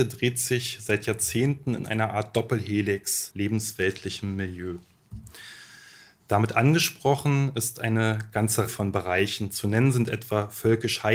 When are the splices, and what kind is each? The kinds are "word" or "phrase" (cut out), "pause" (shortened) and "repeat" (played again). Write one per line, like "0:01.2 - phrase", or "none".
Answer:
0:03.3 - phrase
0:08.7 - word